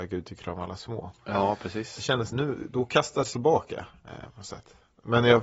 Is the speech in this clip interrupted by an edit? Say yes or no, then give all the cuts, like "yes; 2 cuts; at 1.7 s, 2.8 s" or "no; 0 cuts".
yes; 2 cuts; at 2.3 s, 3.3 s